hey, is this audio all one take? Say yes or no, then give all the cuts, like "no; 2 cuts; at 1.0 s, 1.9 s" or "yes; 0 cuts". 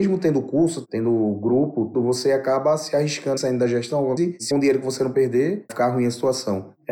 no; 6 cuts; at 1.9 s, 3.4 s, 4.2 s, 4.5 s, 5.1 s, 5.7 s